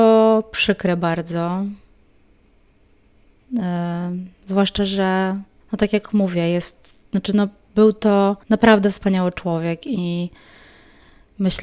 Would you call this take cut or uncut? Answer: cut